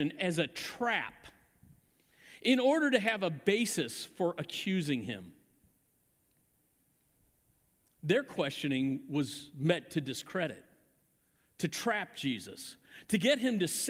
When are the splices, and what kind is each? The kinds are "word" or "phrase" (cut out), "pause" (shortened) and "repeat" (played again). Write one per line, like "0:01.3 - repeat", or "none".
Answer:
none

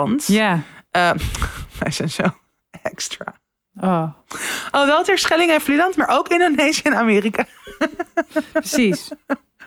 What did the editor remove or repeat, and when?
none

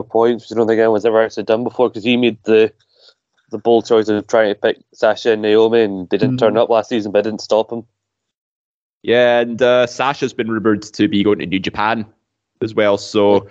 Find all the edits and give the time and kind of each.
none

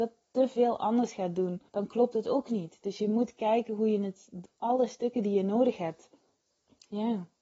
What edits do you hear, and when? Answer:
0:01.7 - pause
0:06.5 - pause

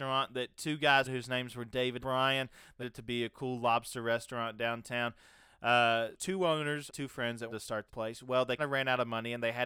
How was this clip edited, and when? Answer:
0:01.0 - word
0:02.0 - word
0:02.8 - word
0:06.1 - word
0:06.9 - word
0:07.5 - word
0:07.9 - word
0:08.6 - word

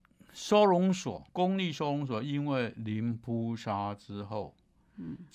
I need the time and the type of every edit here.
0:01.3 - pause

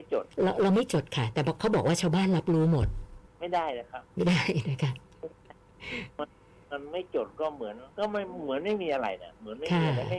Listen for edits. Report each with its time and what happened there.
0:03.3 - pause
0:06.1 - pause
0:07.9 - pause

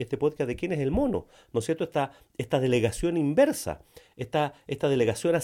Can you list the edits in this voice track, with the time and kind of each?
none

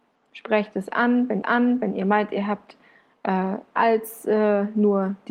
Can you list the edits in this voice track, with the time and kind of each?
0:01.4 - repeat
0:03.8 - word

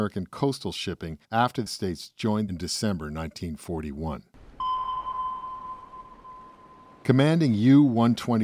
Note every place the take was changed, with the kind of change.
0:01.2 - pause
0:01.7 - word
0:02.5 - phrase

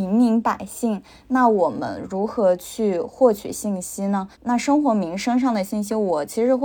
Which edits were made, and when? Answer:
0:04.3 - pause

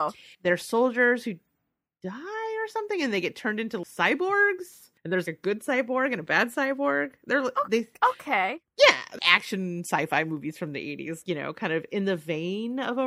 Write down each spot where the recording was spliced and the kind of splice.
0:05.0 - pause
0:09.2 - word

